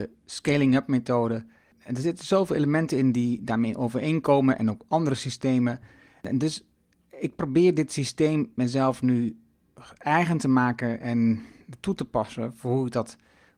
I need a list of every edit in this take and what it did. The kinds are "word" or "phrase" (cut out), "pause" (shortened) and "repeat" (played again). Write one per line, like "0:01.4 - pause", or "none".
none